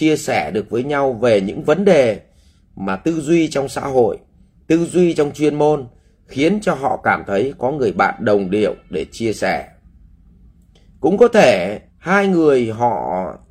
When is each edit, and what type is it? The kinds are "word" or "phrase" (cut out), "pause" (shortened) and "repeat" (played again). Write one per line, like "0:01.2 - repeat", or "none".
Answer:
0:11.9 - pause